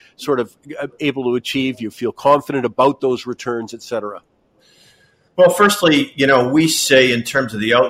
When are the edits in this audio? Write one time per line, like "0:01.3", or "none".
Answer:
none